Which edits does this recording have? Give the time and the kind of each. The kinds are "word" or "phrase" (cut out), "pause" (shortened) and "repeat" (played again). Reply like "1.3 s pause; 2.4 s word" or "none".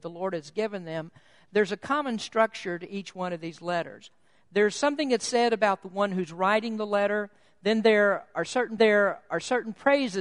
8.8 s repeat